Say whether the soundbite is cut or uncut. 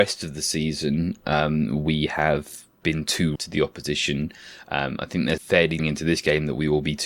cut